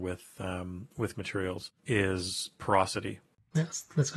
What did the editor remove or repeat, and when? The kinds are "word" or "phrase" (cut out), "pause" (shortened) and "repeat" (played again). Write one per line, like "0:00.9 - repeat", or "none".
0:01.1 - word
0:01.8 - pause

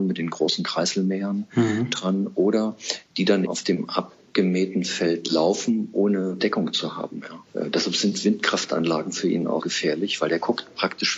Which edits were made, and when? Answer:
0:03.4 - word
0:06.4 - word
0:09.6 - word

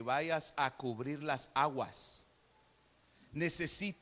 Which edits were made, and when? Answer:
none

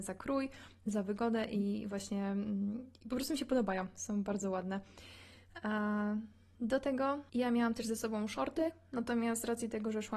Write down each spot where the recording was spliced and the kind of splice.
none

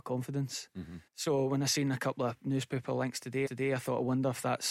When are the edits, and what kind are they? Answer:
0:01.1 - pause
0:03.5 - repeat

